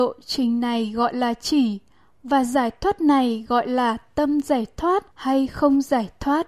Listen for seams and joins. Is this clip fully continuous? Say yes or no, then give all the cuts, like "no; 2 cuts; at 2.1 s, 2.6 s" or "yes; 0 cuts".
no; 1 cut; at 5.1 s